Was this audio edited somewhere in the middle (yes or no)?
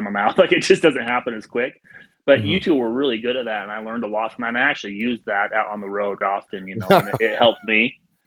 yes